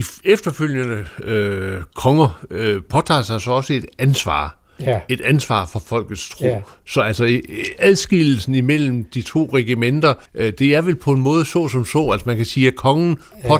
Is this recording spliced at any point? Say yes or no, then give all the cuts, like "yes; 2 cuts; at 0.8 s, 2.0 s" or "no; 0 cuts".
yes; 1 cut; at 10.3 s